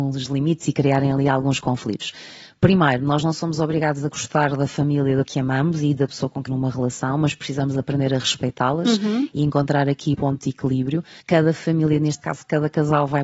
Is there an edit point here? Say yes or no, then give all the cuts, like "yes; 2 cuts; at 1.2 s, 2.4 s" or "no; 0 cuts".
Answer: yes; 4 cuts; at 5.2 s, 6.5 s, 10.1 s, 11.2 s